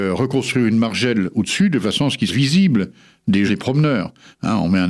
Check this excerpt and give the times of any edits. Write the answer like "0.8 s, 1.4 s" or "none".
2.3 s, 3.5 s